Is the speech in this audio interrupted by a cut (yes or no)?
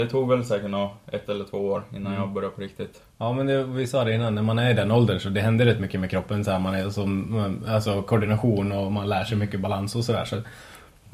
yes